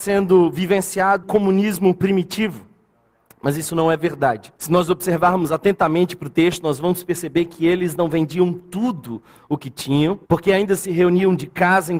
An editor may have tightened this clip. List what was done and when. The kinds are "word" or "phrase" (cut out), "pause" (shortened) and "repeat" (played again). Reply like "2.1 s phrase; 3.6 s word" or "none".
1.2 s word; 4.6 s pause; 10.2 s pause